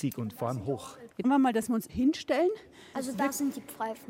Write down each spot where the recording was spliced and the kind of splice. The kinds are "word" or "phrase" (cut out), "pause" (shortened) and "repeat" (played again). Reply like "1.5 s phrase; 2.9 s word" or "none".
1.2 s word; 1.9 s word